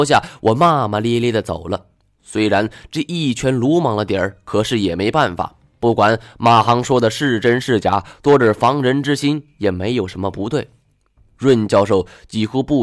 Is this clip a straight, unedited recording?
yes; 0 cuts

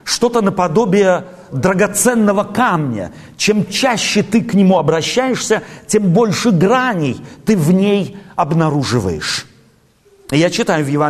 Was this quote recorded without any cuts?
yes; 0 cuts

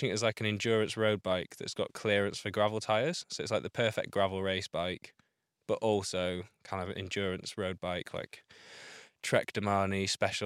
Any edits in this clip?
no; 0 cuts

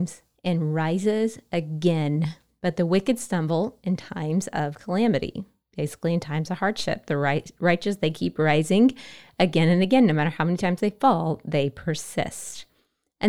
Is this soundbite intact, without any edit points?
yes; 0 cuts

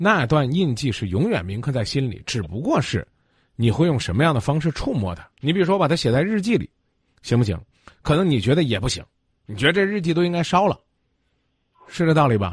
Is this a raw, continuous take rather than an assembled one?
no; 1 cut; at 5.3 s

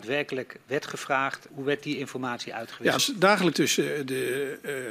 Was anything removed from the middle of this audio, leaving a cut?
yes; 3 cuts; at 1.5 s, 3.0 s, 3.5 s

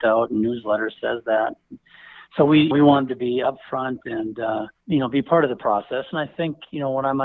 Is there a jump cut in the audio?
yes; 3 cuts; at 2.7 s, 3.1 s, 4.8 s

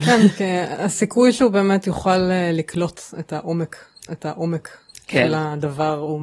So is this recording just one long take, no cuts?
no; 1 cut; at 4.1 s

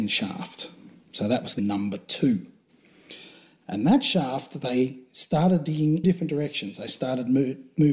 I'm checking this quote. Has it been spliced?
yes; 2 cuts; at 1.6 s, 6.0 s

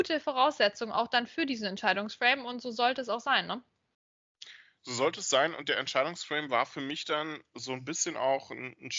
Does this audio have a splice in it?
no; 0 cuts

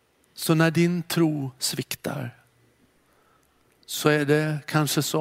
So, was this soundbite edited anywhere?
no; 0 cuts

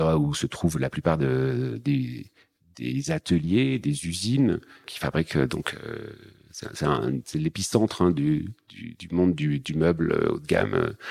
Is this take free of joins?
yes; 0 cuts

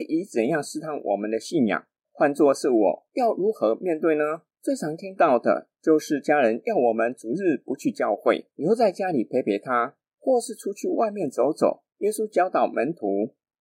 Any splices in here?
yes; 5 cuts; at 2.0 s, 4.5 s, 5.7 s, 8.5 s, 11.9 s

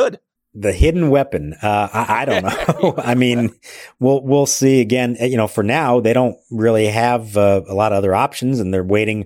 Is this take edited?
no; 0 cuts

